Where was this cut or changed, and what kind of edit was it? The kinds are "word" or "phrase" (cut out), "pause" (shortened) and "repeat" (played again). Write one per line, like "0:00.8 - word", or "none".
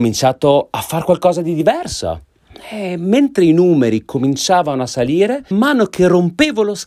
0:05.5 - word